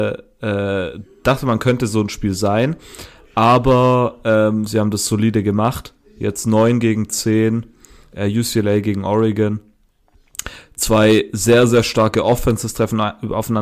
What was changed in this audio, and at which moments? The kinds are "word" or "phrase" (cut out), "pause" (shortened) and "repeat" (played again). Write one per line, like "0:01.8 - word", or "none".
none